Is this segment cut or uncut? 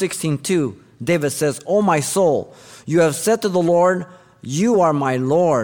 uncut